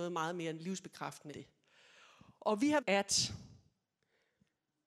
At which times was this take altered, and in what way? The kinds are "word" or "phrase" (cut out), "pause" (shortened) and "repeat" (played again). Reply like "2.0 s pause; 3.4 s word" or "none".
1.3 s word; 2.8 s phrase